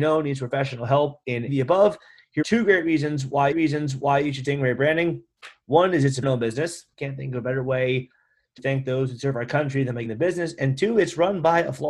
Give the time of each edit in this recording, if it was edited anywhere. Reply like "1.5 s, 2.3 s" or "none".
1.5 s, 2.4 s, 3.5 s, 4.4 s, 6.2 s, 6.9 s, 8.6 s, 10.0 s